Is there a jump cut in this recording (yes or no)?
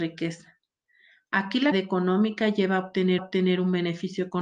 yes